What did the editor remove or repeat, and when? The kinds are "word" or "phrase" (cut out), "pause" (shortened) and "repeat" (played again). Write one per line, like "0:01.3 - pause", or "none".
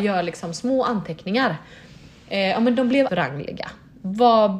0:03.1 - word